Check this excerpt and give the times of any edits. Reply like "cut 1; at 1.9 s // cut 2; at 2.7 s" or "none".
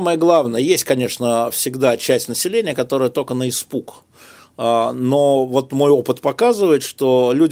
none